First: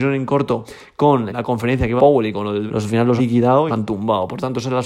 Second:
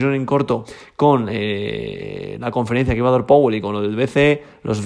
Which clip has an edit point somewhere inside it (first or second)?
first